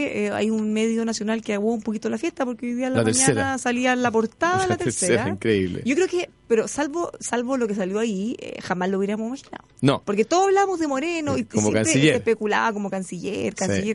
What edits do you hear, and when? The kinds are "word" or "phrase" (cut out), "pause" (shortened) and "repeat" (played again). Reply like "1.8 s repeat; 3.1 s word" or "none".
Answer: 6.3 s pause; 10.0 s pause